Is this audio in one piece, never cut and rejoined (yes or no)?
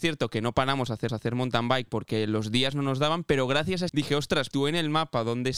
no